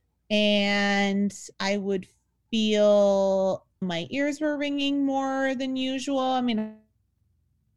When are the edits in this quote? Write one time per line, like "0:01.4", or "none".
0:01.5
0:03.8